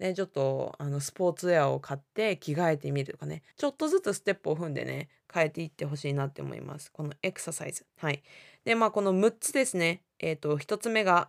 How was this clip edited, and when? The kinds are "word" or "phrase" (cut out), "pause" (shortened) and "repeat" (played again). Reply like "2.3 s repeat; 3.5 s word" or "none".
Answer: 3.5 s pause; 7.9 s pause